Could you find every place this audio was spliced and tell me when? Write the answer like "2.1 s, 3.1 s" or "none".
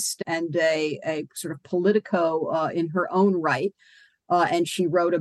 none